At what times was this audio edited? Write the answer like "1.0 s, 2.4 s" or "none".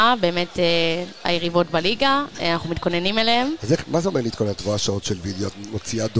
none